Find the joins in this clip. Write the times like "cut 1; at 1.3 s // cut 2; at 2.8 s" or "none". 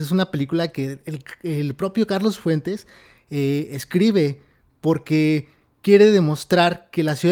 none